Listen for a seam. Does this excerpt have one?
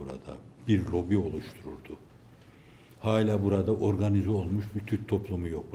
no; 0 cuts

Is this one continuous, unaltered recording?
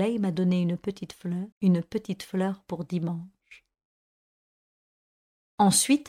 no; 1 cut; at 1.5 s

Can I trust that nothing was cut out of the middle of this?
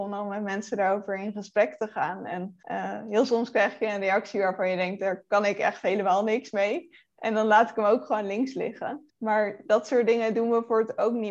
no; 2 cuts; at 2.6 s, 9.1 s

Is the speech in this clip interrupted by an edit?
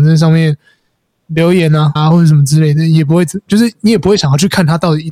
yes; 1 cut; at 2.0 s

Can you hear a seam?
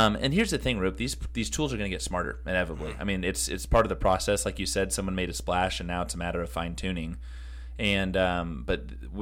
no; 0 cuts

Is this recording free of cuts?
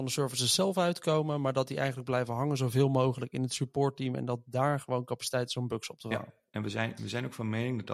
yes; 0 cuts

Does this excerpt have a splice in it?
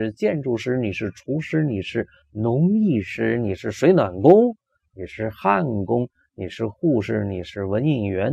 no; 0 cuts

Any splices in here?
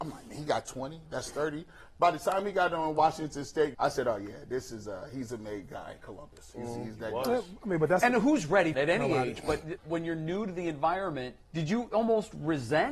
yes; 4 cuts; at 3.7 s, 8.7 s, 9.8 s, 11.4 s

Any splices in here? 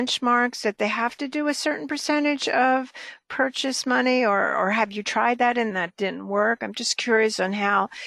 yes; 1 cut; at 5.7 s

